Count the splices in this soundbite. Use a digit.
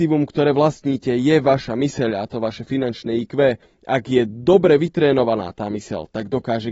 1